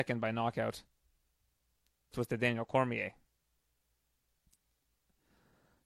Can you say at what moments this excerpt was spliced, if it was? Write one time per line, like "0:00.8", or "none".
0:02.1